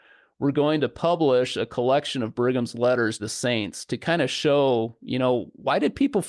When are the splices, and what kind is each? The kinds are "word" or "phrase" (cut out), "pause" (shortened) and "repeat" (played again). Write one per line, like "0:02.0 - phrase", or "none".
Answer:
0:03.2 - word